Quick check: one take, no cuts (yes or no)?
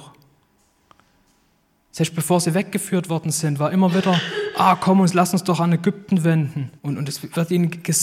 no